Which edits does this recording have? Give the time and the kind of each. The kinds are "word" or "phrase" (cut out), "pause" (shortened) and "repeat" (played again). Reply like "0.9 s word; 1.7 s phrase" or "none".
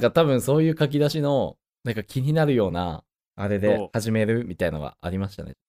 none